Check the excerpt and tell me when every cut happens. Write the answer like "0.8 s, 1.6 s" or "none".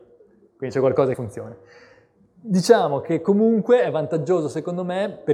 1.1 s